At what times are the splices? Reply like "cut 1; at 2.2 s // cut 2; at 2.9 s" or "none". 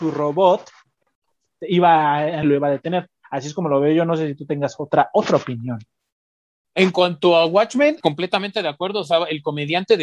cut 1; at 2.4 s